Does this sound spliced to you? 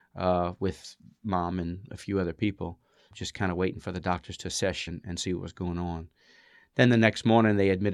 yes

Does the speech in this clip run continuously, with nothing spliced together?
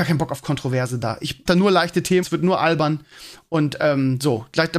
no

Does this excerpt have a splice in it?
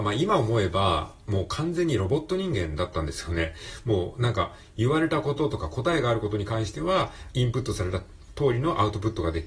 yes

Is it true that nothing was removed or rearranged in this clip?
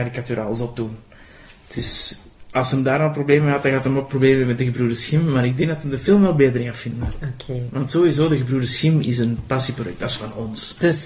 yes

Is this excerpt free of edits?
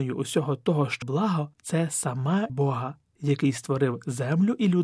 no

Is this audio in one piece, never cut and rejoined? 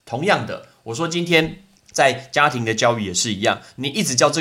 no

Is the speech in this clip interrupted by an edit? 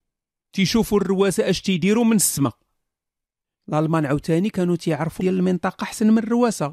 yes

